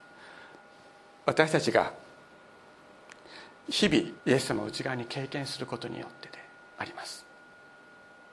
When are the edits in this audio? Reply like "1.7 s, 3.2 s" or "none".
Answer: 4.2 s